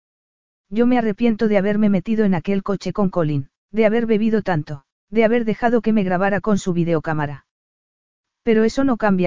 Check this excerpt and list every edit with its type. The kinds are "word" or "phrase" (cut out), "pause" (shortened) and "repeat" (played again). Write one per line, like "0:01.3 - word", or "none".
0:03.6 - pause
0:04.9 - pause